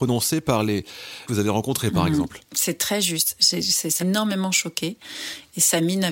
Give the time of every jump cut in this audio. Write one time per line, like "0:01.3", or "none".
0:01.3
0:04.0